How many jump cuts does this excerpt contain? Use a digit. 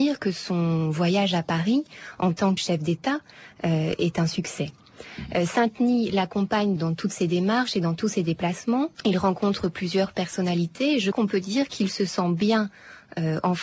4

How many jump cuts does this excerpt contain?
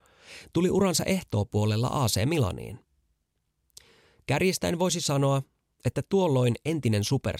0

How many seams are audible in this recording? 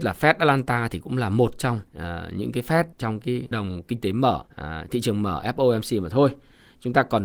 4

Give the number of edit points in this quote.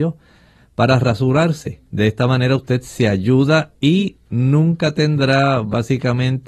2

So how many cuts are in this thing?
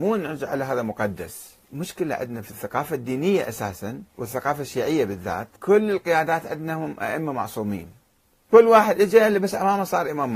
3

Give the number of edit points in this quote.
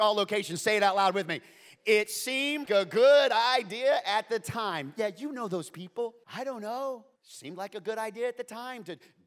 3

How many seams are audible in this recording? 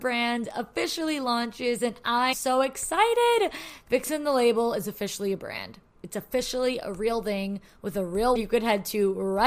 2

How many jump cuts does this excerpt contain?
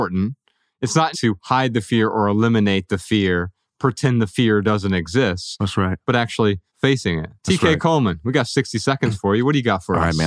3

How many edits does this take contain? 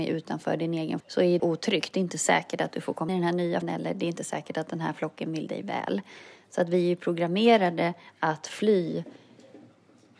4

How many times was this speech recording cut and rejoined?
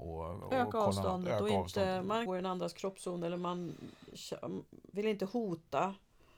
2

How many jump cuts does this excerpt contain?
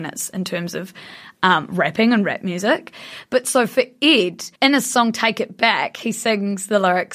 1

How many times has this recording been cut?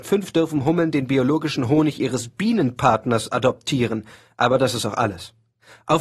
0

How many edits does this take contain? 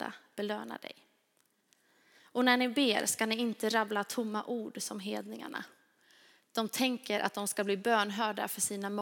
0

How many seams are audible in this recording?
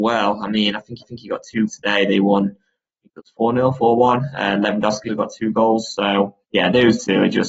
4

